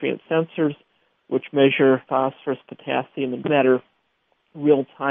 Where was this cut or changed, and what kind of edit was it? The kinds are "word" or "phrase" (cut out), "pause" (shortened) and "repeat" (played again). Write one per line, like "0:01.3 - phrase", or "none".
0:02.1 - word
0:03.4 - word